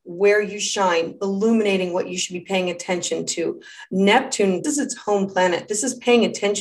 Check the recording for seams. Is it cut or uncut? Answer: cut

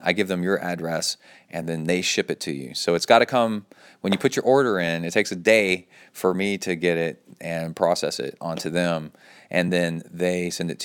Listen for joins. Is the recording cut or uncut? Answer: uncut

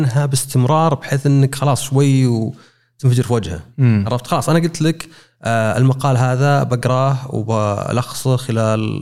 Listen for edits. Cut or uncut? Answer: uncut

